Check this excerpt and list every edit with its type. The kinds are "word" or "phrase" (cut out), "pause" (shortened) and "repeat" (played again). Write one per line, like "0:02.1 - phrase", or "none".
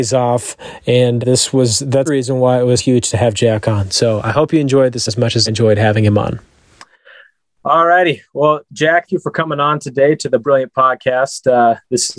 0:01.2 - word
0:02.1 - word
0:02.8 - word
0:05.1 - word
0:05.5 - word
0:09.1 - word
0:10.4 - word

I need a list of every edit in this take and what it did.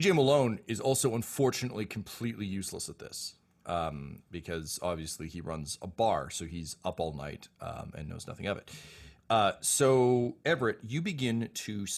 none

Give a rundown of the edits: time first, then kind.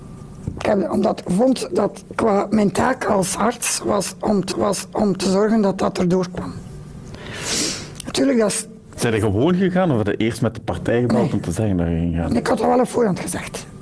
0:04.5 - repeat

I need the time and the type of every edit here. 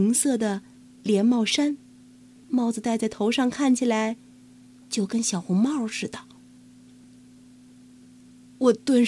0:02.4 - word

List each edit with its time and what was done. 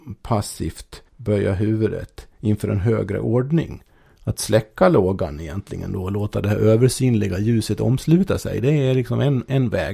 0:01.1 - pause

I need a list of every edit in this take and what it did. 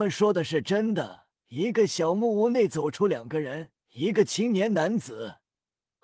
0:01.4 - pause
0:03.8 - pause

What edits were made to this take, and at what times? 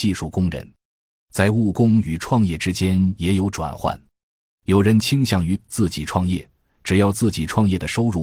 none

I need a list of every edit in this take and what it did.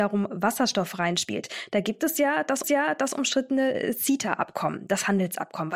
0:02.6 - repeat

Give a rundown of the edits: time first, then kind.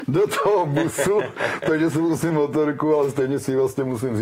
0:02.3 - word

